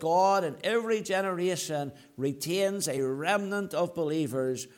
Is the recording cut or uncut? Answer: uncut